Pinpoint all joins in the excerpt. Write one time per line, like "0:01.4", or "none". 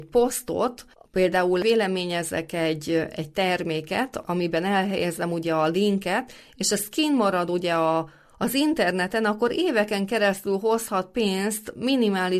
none